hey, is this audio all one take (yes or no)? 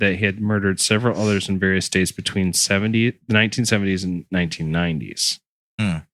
yes